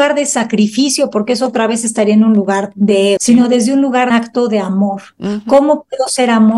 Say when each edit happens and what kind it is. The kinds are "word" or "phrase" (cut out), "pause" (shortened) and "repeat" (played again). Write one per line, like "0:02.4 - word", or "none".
0:03.2 - word
0:04.1 - phrase